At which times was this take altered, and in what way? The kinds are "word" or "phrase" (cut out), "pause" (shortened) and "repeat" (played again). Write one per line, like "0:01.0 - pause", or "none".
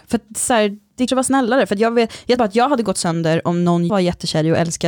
0:01.1 - word
0:02.4 - word
0:03.9 - word